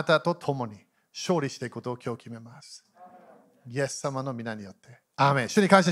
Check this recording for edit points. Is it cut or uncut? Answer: uncut